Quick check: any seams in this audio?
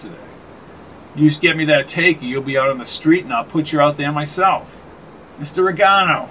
no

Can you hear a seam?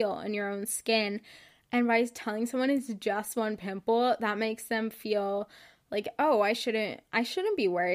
no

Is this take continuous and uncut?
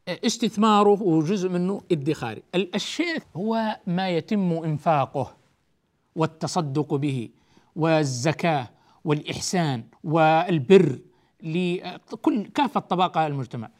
no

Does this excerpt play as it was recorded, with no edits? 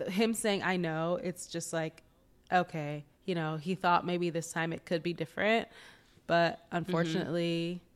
yes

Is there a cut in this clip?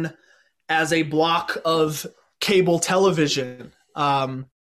no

